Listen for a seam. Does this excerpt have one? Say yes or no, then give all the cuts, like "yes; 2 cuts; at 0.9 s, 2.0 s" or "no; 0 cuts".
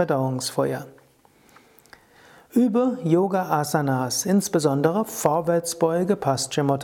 no; 0 cuts